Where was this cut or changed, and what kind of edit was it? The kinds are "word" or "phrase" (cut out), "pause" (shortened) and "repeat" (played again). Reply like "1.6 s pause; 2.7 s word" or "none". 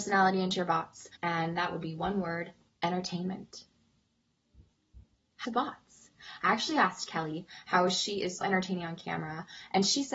1.2 s pause; 2.7 s pause; 5.4 s phrase; 8.4 s word